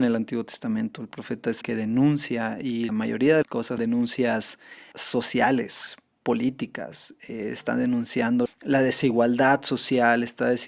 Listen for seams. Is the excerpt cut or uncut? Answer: cut